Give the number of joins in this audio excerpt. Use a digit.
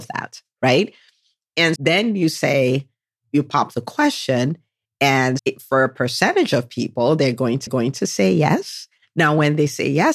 4